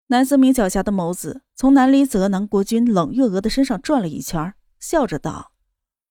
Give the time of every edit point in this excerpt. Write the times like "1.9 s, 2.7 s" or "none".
none